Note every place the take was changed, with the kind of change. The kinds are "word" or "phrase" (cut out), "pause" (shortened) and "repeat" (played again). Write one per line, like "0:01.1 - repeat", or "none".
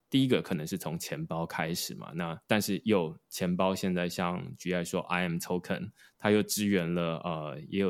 none

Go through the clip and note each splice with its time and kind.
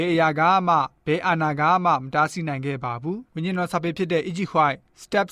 0:03.3 - pause

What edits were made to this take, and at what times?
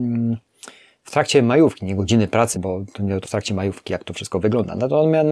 0:02.5 - word
0:03.2 - phrase

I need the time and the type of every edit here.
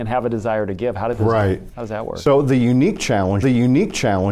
0:03.4 - repeat

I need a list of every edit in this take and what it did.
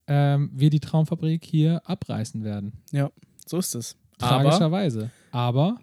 none

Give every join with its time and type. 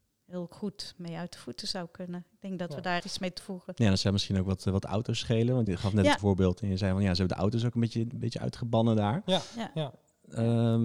0:03.0 - word
0:03.4 - word
0:05.7 - word
0:06.2 - word

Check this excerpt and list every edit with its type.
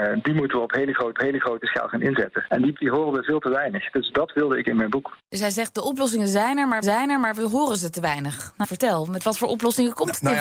0:01.1 - repeat
0:02.7 - word
0:04.6 - word
0:05.2 - pause
0:06.8 - repeat
0:08.6 - word

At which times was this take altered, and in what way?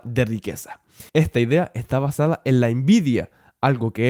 0:01.1 - pause

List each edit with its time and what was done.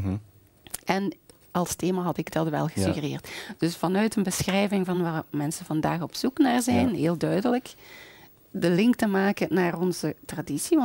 none

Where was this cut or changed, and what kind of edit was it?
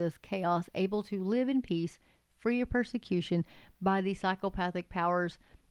none

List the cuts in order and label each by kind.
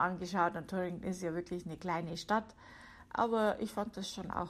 none

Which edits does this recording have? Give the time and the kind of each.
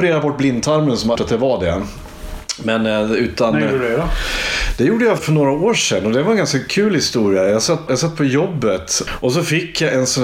0:01.2 - phrase
0:05.2 - word
0:07.9 - word
0:09.1 - word

